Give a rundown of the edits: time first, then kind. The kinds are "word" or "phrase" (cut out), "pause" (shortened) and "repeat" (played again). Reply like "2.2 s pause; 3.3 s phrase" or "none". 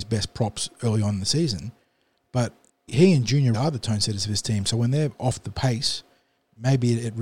2.9 s word; 3.5 s word